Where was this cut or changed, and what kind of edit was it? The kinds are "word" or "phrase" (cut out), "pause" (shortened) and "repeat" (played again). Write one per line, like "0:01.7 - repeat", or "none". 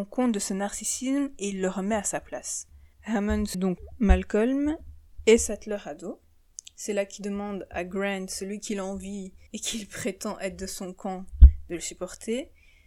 0:02.9 - pause
0:03.5 - word
0:09.5 - pause